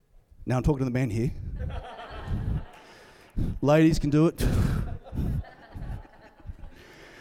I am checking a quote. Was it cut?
no; 0 cuts

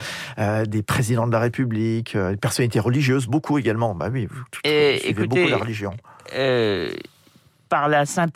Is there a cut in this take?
no; 0 cuts

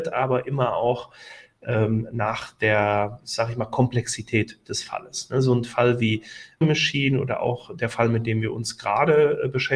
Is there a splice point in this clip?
yes; 1 cut; at 6.6 s

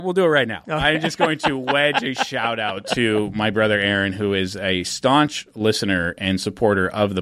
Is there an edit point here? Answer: no; 0 cuts

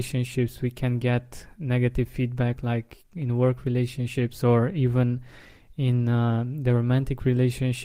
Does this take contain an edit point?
no; 0 cuts

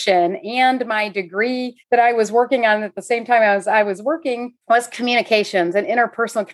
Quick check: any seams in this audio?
yes; 2 cuts; at 1.8 s, 4.6 s

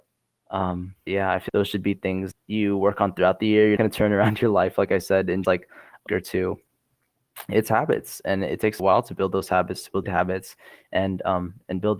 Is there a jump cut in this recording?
yes; 8 cuts; at 1.1 s, 1.5 s, 2.3 s, 3.8 s, 5.4 s, 6.1 s, 8.8 s, 10.0 s

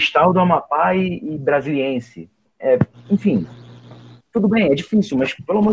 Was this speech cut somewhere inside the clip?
yes; 2 cuts; at 2.4 s, 4.2 s

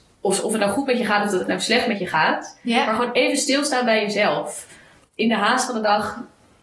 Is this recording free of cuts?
yes; 0 cuts

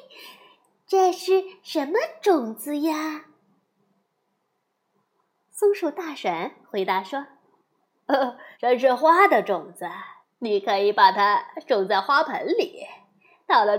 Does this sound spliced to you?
yes; 2 cuts; at 8.5 s, 10.2 s

